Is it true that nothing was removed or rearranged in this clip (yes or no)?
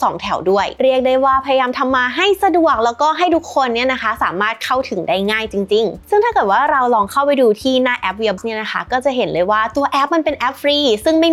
no